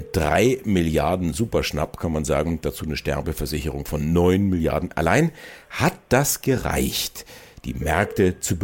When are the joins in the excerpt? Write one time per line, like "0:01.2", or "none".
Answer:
none

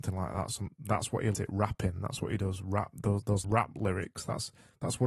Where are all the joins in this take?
0:01.3
0:03.4

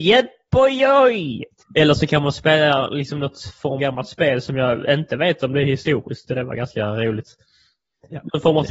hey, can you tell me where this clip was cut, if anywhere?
0:01.6
0:03.8
0:06.3

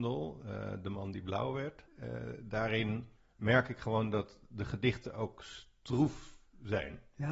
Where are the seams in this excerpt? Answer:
0:01.9
0:03.2

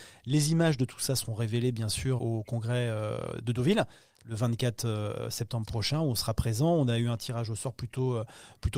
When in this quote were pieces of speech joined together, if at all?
0:02.2

